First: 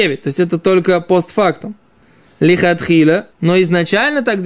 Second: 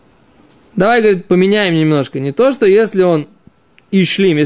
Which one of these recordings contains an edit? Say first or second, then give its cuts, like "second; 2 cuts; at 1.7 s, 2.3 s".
first; 1 cut; at 3.3 s